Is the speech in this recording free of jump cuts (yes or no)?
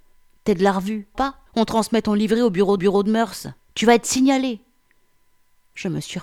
no